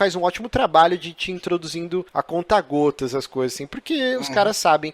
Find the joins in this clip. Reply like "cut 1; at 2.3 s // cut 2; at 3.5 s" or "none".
cut 1; at 2.1 s